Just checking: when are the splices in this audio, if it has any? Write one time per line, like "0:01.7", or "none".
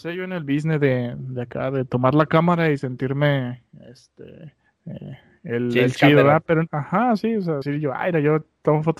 0:04.7
0:06.7
0:07.6